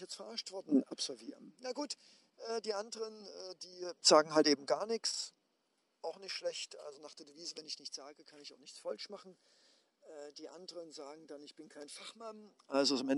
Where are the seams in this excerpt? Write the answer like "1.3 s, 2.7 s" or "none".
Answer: none

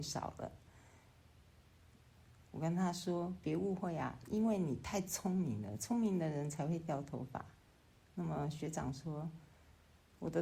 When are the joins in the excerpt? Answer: 7.6 s

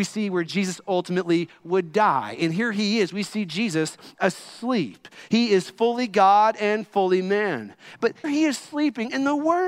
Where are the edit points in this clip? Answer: 8.2 s

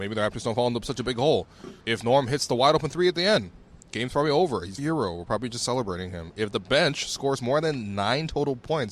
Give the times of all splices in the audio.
1.8 s, 3.8 s, 4.8 s

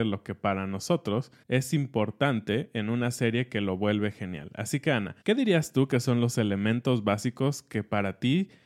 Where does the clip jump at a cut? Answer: 1.4 s, 5.2 s

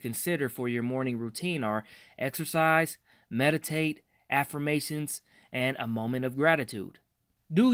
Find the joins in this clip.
none

